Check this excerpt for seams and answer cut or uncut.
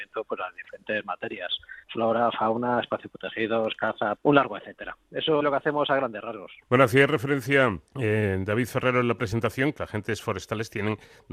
cut